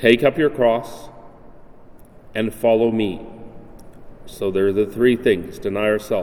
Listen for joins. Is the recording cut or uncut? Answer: uncut